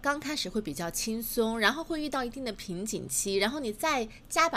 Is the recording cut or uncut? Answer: uncut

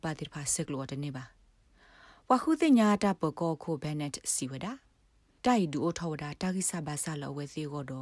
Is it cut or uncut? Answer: uncut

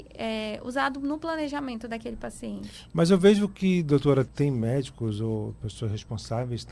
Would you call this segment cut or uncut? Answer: cut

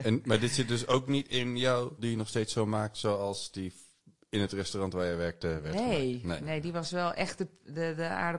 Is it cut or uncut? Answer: cut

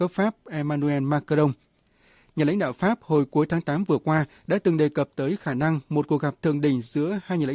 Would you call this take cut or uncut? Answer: uncut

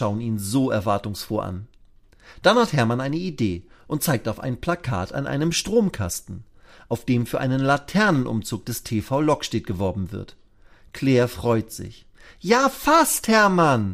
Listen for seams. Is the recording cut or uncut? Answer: uncut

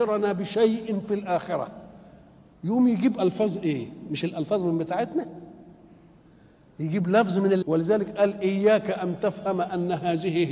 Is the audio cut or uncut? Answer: cut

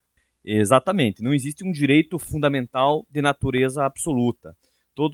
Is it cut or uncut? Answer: uncut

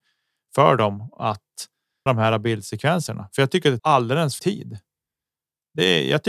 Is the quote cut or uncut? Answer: cut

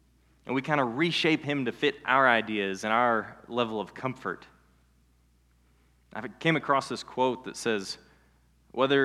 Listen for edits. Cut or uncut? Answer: uncut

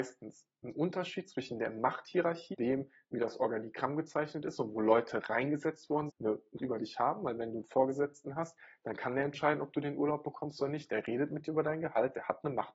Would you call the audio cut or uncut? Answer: cut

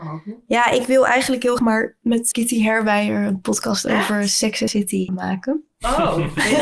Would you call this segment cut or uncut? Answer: cut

